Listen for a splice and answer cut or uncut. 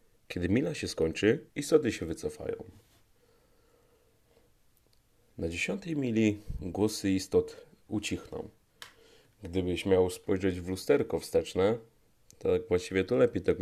cut